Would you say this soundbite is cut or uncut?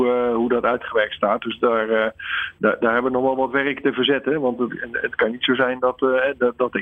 uncut